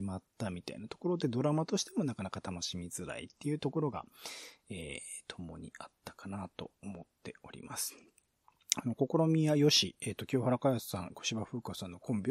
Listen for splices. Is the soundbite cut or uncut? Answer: uncut